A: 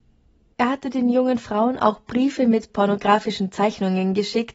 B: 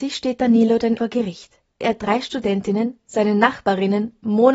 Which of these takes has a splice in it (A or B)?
B